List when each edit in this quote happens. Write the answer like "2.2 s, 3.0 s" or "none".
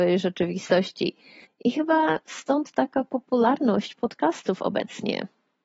1.4 s